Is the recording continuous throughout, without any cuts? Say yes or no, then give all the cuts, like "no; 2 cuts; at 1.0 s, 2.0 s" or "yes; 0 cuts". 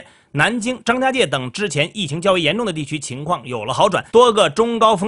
no; 1 cut; at 4.1 s